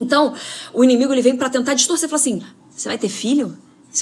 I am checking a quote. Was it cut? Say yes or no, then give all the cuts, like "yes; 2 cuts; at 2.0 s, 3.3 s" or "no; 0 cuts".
no; 0 cuts